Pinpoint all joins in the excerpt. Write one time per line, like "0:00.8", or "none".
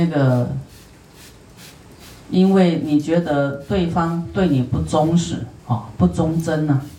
0:05.6

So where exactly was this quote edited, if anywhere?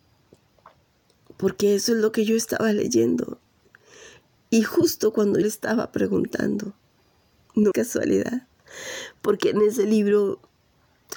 0:05.4
0:07.7

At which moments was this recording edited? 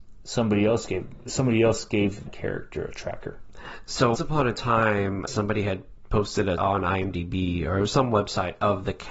0:02.3
0:04.1
0:05.3
0:06.6

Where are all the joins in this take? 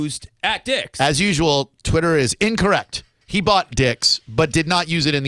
0:03.7

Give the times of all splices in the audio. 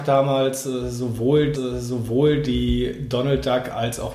0:01.5

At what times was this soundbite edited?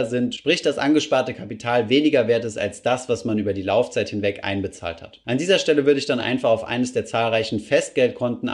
none

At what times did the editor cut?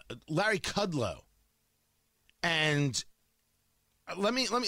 0:01.5

